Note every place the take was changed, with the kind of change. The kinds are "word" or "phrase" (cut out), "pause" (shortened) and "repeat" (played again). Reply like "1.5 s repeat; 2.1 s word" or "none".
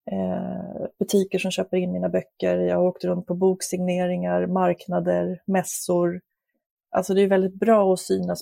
none